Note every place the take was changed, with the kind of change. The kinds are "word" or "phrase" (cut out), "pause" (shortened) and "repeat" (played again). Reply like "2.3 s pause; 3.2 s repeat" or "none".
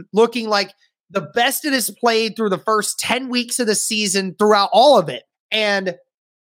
5.3 s pause